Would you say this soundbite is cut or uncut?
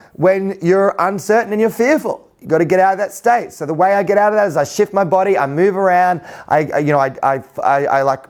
uncut